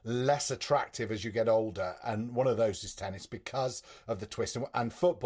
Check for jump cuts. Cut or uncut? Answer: uncut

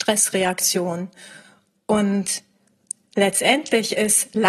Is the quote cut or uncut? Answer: uncut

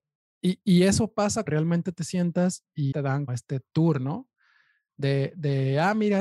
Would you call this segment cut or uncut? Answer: cut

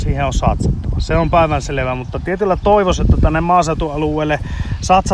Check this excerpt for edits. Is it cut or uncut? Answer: cut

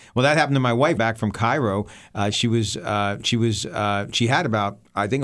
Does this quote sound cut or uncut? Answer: cut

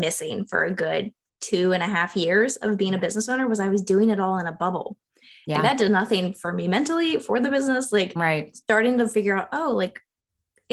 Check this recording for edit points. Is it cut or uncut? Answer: uncut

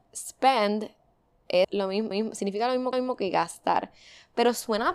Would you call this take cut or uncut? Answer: cut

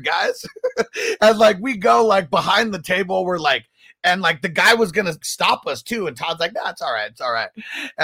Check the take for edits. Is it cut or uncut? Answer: cut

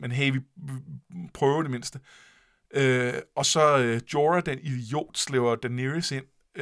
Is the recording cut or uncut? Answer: uncut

